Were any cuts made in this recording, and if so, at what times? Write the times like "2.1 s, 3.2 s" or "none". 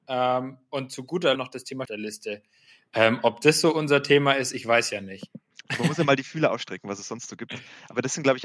1.4 s, 1.9 s